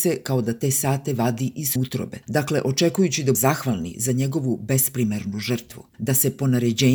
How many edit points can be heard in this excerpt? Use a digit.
4